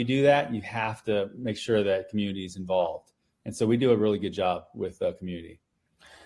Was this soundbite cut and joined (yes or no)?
no